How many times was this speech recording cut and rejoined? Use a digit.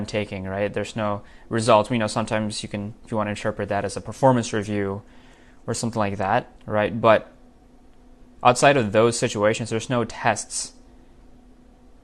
1